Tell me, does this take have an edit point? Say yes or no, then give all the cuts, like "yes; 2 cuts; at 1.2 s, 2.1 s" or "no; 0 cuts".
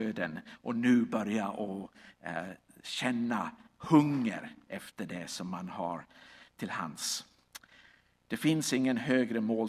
no; 0 cuts